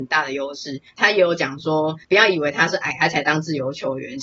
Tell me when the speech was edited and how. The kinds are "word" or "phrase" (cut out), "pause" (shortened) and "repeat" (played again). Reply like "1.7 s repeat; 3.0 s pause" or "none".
2.0 s pause